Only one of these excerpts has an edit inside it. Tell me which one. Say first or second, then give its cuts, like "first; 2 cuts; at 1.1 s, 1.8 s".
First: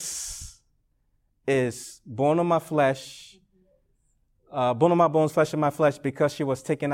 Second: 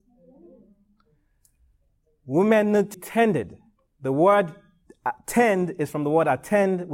second; 1 cut; at 2.9 s